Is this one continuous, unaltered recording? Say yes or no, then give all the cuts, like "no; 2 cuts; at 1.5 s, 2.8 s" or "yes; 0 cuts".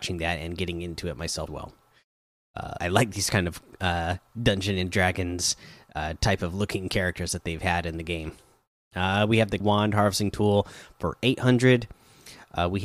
no; 3 cuts; at 1.5 s, 2.8 s, 9.6 s